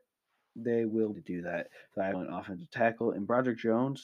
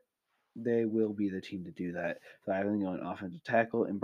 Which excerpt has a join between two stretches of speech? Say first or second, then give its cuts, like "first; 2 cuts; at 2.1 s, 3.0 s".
first; 2 cuts; at 1.1 s, 2.1 s